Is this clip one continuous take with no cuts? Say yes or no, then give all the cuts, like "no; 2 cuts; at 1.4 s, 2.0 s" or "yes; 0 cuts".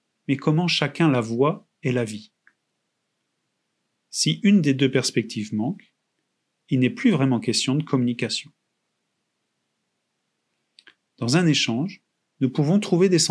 yes; 0 cuts